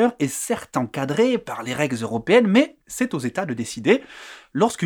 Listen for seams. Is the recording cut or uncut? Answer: cut